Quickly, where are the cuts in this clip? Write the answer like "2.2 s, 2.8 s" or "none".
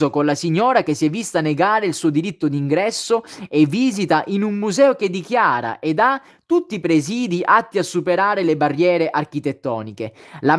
none